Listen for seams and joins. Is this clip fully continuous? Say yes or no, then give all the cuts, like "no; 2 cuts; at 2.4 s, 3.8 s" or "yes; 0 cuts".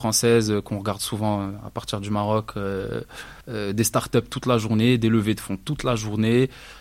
no; 1 cut; at 3.4 s